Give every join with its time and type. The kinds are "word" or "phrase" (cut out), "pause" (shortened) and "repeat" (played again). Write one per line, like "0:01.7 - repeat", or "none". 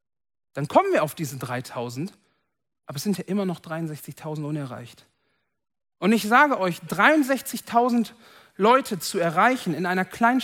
none